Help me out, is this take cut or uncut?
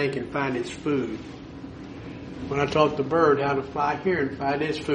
uncut